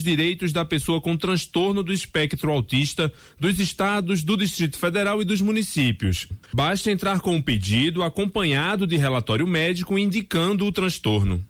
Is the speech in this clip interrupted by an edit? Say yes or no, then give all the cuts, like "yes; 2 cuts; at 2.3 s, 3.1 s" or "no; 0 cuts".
no; 0 cuts